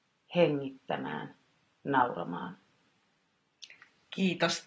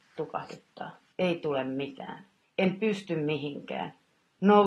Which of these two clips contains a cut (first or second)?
second